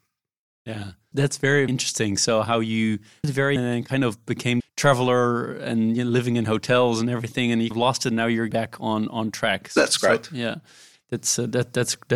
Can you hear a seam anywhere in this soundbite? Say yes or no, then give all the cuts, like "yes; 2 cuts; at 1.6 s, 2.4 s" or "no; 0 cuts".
yes; 7 cuts; at 1.1 s, 1.7 s, 3.2 s, 3.6 s, 4.6 s, 7.7 s, 8.5 s